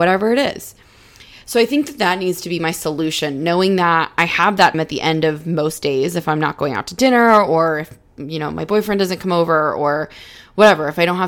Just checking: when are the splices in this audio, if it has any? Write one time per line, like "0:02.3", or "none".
0:04.7